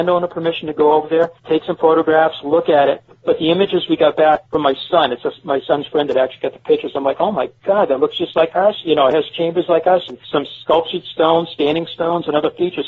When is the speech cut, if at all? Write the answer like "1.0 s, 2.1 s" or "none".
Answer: 1.4 s, 4.4 s, 10.2 s

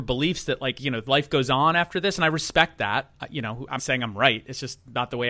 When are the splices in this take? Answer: 3.8 s

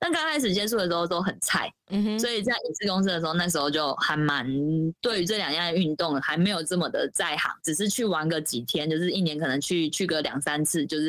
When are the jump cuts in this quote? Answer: 7.6 s

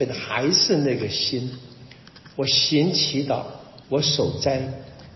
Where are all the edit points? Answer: 3.8 s

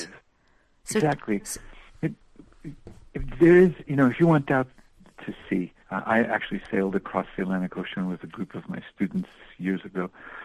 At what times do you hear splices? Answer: 3.1 s, 5.8 s

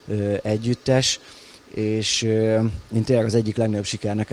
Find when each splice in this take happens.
2.9 s

